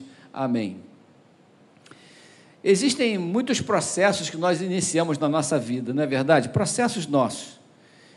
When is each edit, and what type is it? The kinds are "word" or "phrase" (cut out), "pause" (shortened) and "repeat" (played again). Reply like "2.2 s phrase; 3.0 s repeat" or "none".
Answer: none